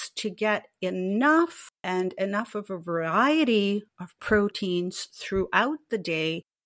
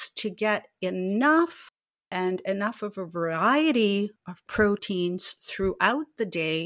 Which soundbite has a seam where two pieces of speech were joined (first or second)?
first